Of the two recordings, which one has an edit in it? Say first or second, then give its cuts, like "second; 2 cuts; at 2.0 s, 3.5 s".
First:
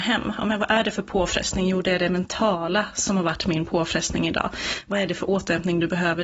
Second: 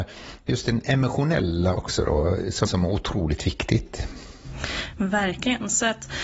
second; 2 cuts; at 1.8 s, 2.7 s